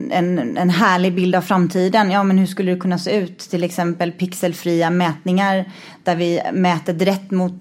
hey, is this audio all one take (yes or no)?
yes